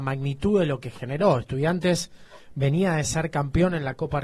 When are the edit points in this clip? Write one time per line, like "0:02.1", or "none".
none